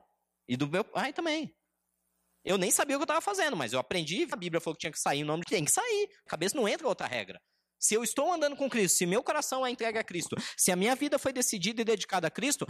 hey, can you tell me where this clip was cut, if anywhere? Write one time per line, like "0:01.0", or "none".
0:04.3
0:05.4
0:06.3